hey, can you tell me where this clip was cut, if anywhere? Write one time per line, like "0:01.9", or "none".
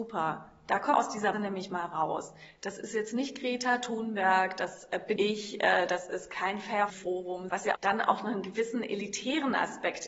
0:00.9
0:01.3
0:05.2
0:06.9
0:07.7

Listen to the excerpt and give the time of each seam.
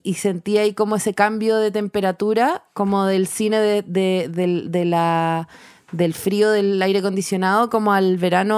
none

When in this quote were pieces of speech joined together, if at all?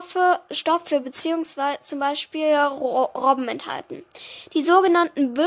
none

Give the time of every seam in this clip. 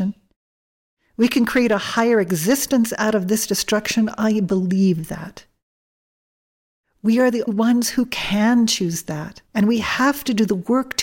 0:07.5
0:09.5

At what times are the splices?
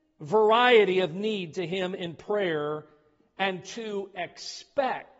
none

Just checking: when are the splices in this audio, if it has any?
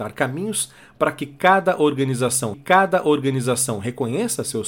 0:02.5

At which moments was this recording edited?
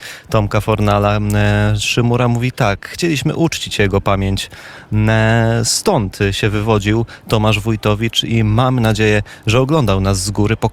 none

